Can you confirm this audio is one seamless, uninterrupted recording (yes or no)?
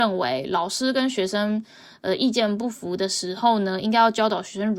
yes